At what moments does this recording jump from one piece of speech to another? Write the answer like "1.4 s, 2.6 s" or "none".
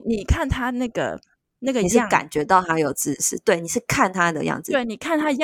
none